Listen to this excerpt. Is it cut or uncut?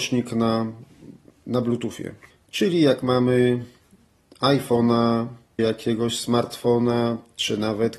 cut